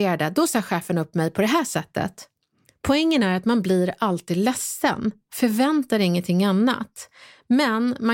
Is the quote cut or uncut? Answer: uncut